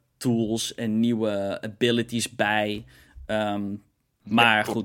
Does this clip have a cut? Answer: no; 0 cuts

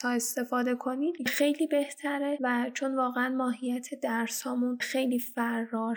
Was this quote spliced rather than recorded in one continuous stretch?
no; 0 cuts

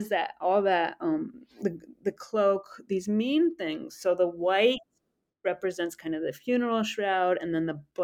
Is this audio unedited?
yes; 0 cuts

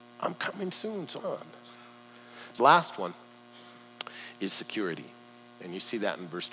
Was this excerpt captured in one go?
no; 2 cuts; at 1.2 s, 2.6 s

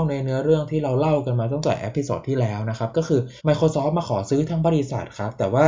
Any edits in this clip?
yes; 1 cut; at 3.4 s

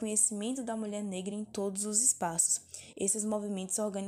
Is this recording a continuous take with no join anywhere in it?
yes; 0 cuts

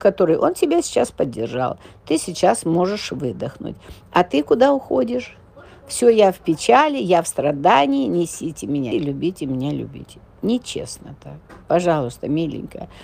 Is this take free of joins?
no; 1 cut; at 8.9 s

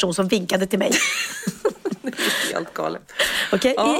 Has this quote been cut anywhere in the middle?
no; 0 cuts

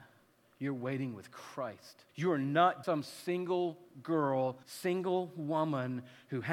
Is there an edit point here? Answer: yes; 3 cuts; at 2.1 s, 2.8 s, 4.6 s

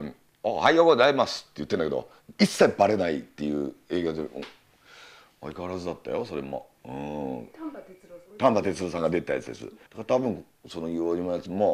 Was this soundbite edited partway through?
yes; 2 cuts; at 8.3 s, 9.9 s

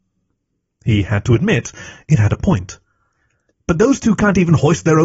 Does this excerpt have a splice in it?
no; 0 cuts

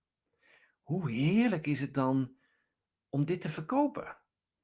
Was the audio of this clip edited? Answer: no; 0 cuts

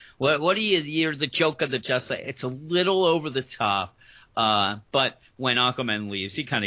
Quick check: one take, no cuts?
yes; 0 cuts

